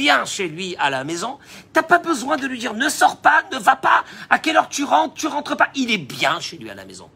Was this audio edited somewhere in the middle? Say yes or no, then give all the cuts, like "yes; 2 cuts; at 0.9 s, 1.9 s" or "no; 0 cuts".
no; 0 cuts